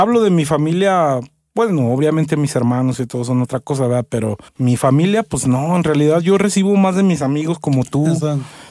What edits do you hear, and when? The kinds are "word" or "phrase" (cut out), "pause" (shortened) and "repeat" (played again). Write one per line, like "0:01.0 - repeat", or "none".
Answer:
0:04.5 - pause